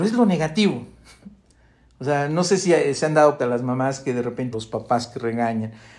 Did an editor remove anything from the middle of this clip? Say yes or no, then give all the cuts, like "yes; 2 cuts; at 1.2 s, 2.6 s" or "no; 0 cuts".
yes; 2 cuts; at 3.4 s, 4.5 s